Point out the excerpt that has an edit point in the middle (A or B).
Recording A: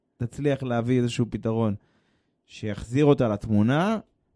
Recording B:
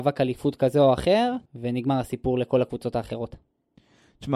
B